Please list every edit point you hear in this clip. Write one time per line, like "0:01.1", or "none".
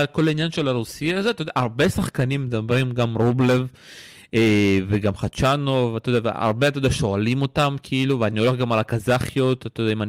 none